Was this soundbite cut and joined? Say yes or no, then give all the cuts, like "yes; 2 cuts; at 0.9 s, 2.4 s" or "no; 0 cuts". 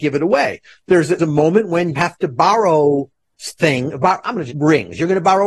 yes; 3 cuts; at 1.2 s, 2.0 s, 4.5 s